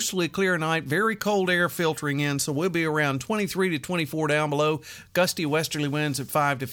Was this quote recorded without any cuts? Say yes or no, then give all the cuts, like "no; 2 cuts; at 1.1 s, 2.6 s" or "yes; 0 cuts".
yes; 0 cuts